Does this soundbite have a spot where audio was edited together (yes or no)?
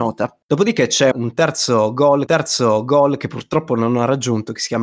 yes